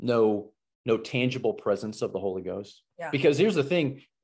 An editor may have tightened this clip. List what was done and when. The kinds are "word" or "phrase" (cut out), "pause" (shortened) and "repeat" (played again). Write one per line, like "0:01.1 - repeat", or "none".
0:02.9 - pause